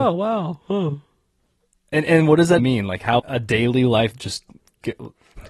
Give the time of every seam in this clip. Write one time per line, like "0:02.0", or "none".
0:02.6
0:03.2
0:04.1